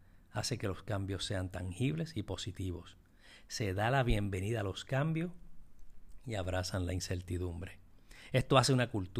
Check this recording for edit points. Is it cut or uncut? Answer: uncut